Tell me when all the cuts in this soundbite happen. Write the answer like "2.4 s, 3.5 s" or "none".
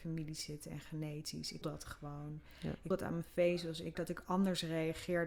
1.6 s, 2.9 s, 3.9 s